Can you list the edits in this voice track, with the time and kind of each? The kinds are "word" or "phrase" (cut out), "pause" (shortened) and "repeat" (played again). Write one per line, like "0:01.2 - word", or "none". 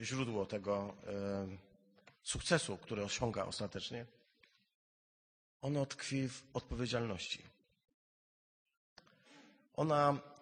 none

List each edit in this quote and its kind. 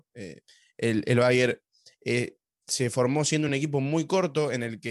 none

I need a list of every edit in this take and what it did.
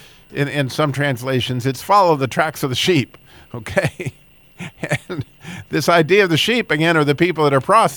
none

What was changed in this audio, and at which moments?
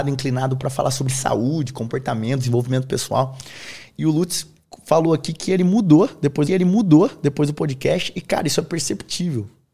0:06.5 - repeat

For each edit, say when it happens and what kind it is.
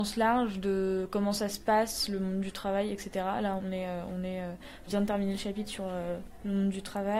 0:03.6 - word
0:04.9 - word

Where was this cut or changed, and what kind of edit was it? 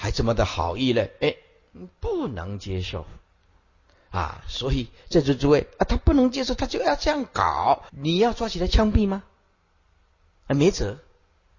0:07.9 - pause

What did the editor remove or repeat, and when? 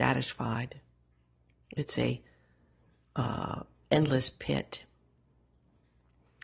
none

